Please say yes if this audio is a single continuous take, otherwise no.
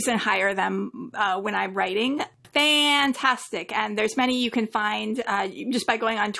no